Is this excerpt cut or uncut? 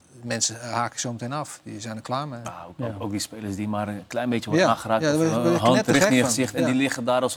uncut